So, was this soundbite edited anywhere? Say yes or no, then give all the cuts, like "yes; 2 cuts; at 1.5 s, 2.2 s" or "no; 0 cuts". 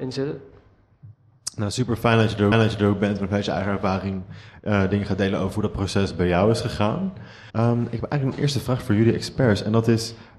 yes; 2 cuts; at 2.5 s, 7.5 s